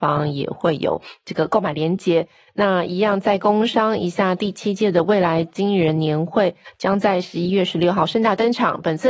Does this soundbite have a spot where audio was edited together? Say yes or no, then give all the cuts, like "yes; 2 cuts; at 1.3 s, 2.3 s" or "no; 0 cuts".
no; 0 cuts